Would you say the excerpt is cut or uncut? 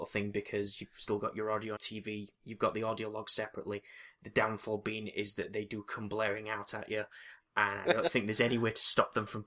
cut